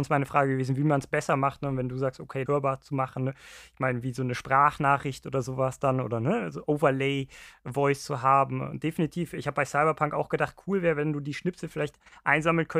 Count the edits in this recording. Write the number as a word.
one